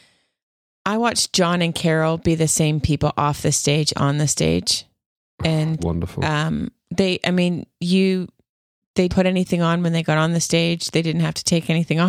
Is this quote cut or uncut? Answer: cut